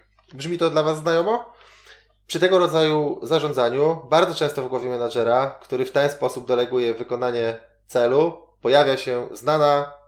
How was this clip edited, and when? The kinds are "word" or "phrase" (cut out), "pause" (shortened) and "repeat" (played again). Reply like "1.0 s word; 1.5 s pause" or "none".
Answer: none